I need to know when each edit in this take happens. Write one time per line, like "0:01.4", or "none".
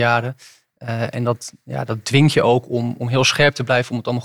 none